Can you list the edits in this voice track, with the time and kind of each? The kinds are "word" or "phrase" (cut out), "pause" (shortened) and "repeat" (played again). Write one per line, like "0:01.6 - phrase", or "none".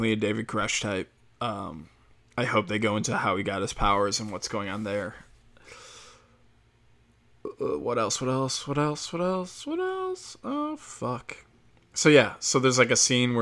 none

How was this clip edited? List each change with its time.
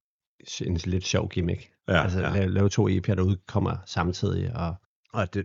0:01.8 - pause

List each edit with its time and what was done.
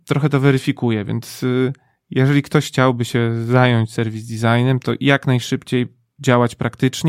none

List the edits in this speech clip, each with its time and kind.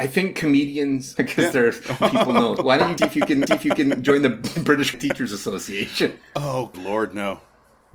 0:01.2 - phrase
0:02.0 - word
0:02.6 - word
0:03.0 - word
0:03.5 - repeat
0:04.9 - word
0:06.7 - word

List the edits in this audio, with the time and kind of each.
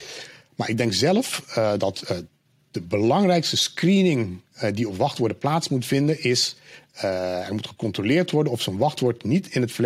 none

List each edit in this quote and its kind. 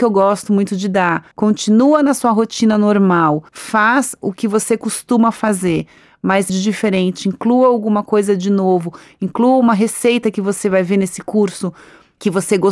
0:01.3 - pause
0:03.5 - pause
0:06.5 - phrase

